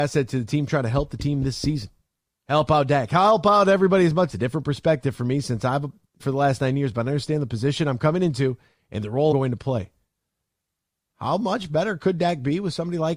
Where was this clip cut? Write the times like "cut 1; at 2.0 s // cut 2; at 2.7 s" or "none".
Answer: cut 1; at 4.3 s // cut 2; at 6.2 s // cut 3; at 9.3 s